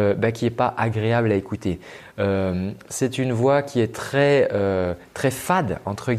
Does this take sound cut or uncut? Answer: uncut